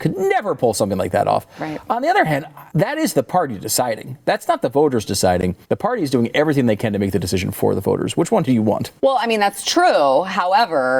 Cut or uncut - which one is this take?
cut